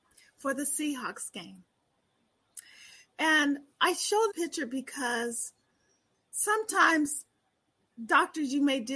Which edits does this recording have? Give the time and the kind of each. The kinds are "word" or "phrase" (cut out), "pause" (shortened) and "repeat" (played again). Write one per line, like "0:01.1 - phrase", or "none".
0:04.3 - word